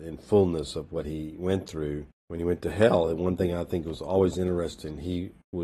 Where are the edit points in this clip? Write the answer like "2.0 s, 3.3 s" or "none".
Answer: 2.1 s